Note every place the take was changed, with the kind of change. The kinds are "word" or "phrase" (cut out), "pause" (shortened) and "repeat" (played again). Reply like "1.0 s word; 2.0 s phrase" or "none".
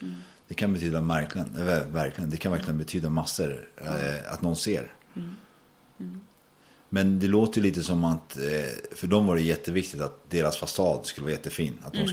none